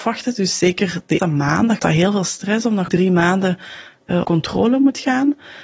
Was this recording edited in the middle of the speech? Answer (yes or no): yes